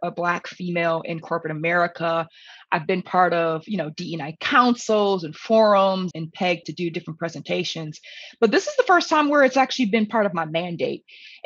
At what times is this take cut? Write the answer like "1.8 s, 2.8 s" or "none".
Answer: 6.1 s, 6.6 s

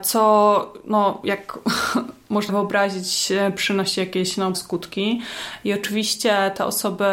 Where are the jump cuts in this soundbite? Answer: 2.5 s, 4.5 s

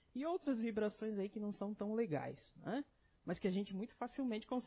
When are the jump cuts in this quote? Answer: none

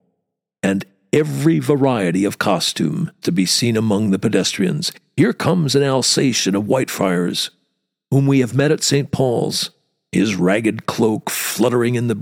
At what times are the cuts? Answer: 3.2 s

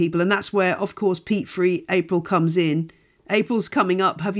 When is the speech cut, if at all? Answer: none

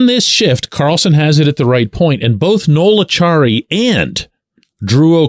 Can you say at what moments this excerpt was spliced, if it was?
none

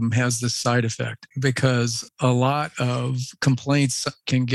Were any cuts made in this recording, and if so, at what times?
1.3 s

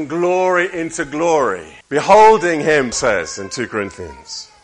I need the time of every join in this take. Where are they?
1.8 s, 2.9 s

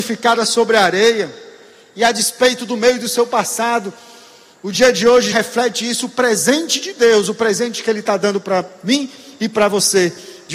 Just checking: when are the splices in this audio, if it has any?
5.3 s

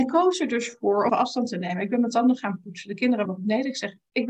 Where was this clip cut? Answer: 1.1 s, 3.2 s

